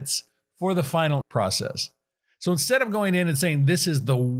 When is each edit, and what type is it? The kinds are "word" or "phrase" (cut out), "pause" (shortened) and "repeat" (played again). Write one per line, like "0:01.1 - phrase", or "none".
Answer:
0:01.2 - word

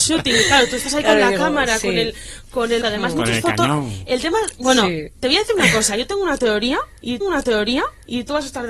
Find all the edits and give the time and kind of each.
0:02.8 - word
0:07.2 - repeat

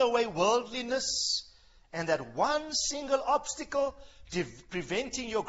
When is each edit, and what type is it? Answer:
none

